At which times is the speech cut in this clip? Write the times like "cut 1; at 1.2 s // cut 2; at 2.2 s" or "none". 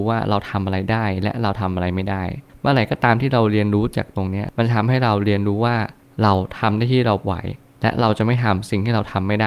none